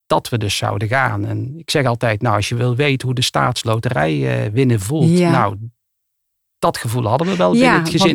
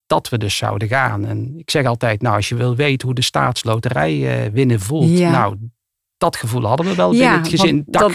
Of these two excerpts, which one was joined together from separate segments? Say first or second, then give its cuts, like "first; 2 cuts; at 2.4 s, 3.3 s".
second; 1 cut; at 5.9 s